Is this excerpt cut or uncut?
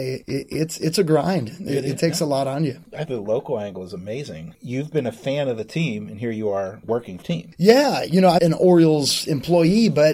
cut